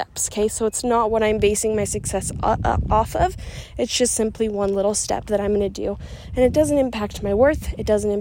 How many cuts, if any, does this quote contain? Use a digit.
0